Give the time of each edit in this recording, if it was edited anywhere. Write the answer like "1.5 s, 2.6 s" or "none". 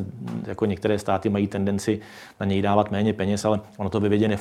none